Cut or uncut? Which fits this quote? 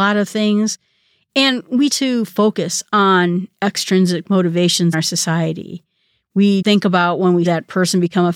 cut